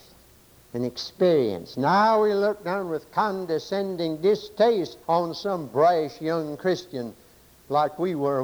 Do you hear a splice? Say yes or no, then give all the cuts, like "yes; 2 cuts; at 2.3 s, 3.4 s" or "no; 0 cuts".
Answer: yes; 1 cut; at 5.0 s